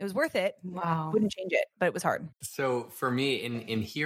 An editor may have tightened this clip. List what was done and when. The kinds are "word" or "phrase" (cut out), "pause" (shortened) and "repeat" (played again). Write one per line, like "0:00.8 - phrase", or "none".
0:02.3 - pause